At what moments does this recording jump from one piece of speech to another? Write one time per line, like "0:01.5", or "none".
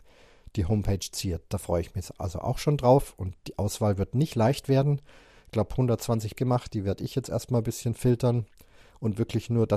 0:06.3